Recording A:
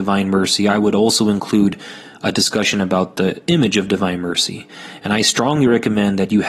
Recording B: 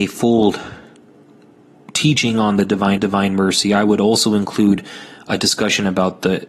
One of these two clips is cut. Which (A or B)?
B